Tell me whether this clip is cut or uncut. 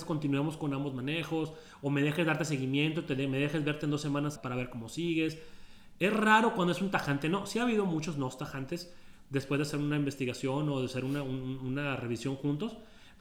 cut